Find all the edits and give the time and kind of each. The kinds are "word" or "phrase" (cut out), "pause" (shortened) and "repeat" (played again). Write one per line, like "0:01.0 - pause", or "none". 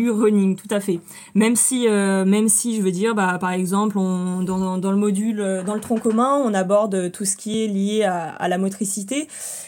none